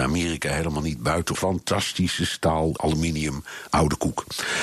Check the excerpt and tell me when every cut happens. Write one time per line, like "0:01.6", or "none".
0:01.3
0:02.8
0:03.7